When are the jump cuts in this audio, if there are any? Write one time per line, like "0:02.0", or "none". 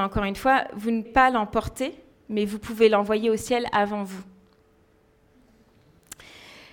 0:01.1